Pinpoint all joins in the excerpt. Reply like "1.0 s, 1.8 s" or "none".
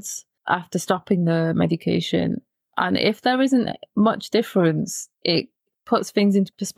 5.1 s